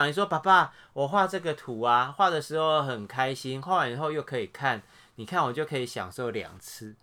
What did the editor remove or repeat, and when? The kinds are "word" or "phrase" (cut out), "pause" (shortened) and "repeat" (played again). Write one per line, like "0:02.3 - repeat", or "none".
none

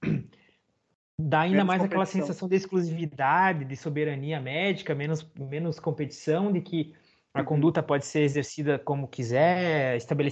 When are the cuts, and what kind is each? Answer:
none

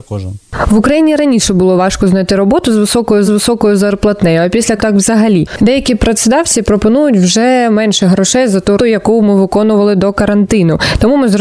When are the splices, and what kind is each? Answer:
0:03.3 - repeat
0:04.8 - word
0:08.8 - word

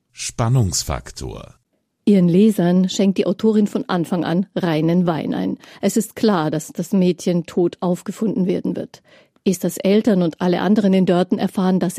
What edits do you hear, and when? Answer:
none

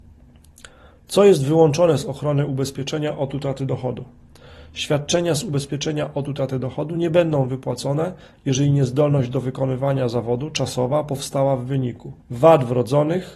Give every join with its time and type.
0:12.2 - pause

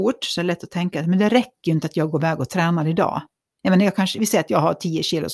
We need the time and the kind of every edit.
none

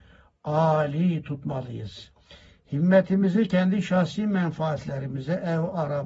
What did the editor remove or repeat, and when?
none

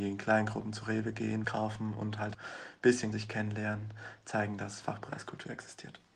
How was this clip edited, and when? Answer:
0:01.4 - word
0:02.3 - word
0:03.1 - word

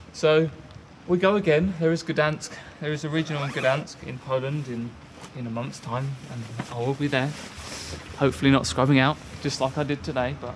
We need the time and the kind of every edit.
none

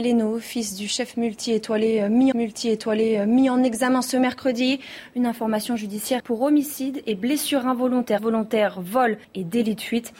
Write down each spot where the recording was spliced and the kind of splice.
0:02.3 - repeat
0:06.2 - phrase
0:08.2 - phrase
0:09.2 - pause

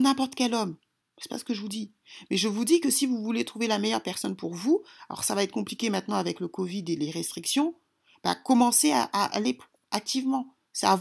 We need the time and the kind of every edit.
none

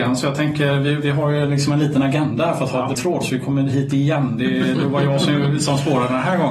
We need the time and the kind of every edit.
0:02.9 - word

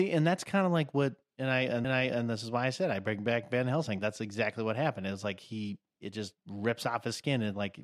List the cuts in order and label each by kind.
0:01.8 - repeat

